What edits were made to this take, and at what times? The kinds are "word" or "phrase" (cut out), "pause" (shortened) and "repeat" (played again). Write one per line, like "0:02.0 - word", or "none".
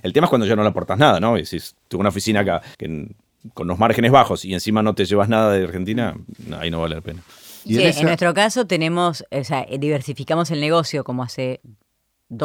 0:02.7 - pause